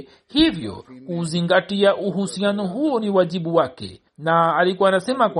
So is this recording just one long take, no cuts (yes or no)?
no